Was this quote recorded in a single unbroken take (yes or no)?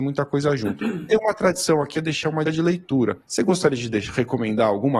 no